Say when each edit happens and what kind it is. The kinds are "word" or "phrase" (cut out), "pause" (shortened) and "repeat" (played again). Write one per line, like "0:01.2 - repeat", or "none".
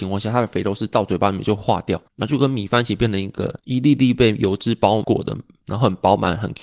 0:02.1 - pause
0:03.6 - pause